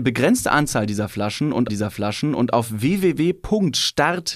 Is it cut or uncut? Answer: cut